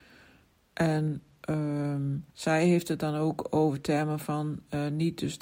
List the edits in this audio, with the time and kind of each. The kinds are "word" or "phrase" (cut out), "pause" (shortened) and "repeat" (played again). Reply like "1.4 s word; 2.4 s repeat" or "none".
2.3 s pause